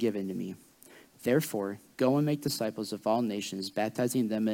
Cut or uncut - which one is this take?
uncut